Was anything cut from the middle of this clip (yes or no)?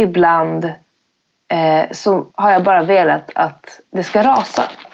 yes